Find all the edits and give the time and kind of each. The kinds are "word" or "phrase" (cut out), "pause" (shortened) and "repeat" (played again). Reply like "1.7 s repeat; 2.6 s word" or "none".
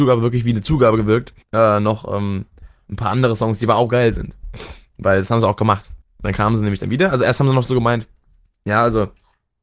1.4 s pause; 6.0 s pause